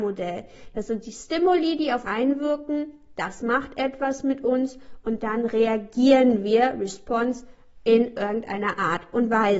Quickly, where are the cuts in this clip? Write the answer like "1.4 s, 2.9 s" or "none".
2.0 s

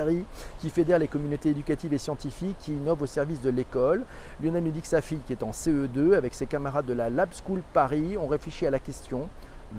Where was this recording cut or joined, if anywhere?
none

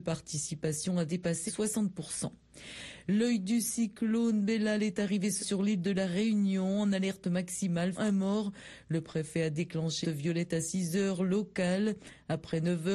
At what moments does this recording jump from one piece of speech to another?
1.5 s, 5.4 s, 8.0 s, 10.0 s

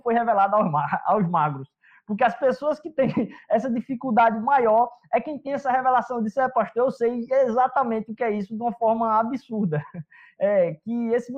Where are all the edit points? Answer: none

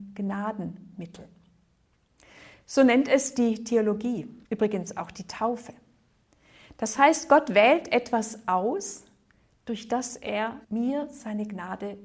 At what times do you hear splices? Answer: 4.4 s, 10.6 s

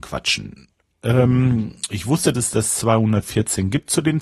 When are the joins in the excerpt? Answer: 2.3 s

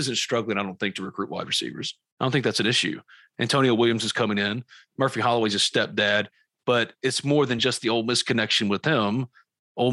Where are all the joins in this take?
none

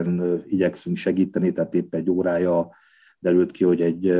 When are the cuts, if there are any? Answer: none

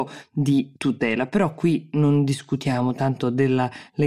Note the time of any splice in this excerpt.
none

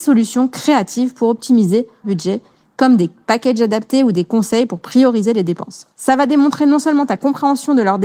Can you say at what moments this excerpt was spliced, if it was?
2.0 s

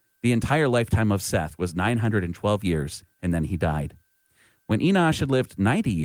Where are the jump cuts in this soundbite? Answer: none

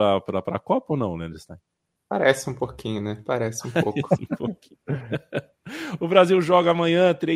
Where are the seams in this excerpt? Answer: none

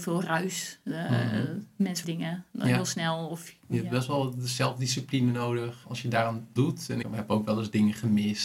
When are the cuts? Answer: 2.0 s, 5.8 s, 6.6 s, 7.0 s

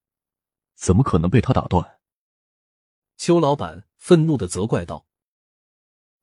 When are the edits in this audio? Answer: none

